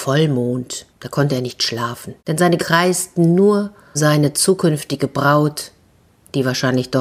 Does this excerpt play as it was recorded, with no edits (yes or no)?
no